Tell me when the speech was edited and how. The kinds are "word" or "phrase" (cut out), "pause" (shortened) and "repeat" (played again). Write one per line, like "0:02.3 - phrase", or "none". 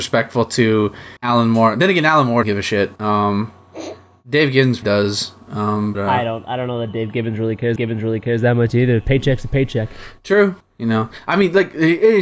0:01.2 - pause
0:02.4 - word
0:03.0 - pause
0:04.8 - word
0:05.9 - word
0:07.8 - repeat
0:10.6 - pause